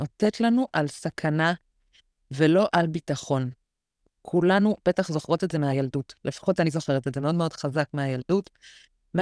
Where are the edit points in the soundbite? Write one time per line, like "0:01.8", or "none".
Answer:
none